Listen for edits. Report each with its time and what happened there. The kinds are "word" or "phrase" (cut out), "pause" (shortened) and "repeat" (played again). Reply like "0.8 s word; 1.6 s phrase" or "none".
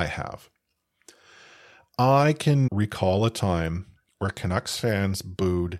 2.7 s word